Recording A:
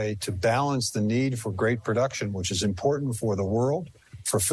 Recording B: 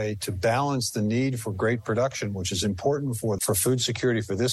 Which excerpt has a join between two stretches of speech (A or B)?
B